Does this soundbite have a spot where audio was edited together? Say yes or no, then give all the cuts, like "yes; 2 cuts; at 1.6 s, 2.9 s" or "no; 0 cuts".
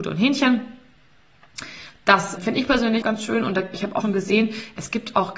yes; 3 cuts; at 2.4 s, 3.0 s, 4.0 s